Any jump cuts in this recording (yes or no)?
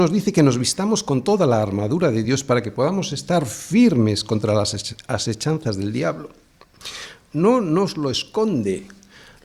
no